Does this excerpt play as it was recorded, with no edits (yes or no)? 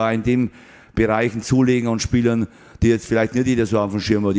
yes